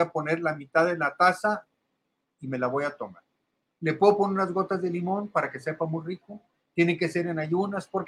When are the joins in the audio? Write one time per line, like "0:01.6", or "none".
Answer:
none